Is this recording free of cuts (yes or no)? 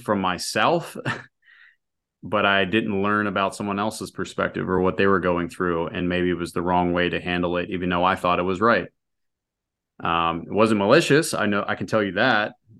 yes